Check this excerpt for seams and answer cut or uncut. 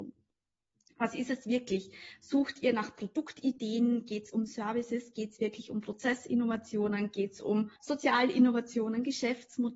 cut